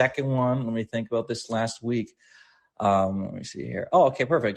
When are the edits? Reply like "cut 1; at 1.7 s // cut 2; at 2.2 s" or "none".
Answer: none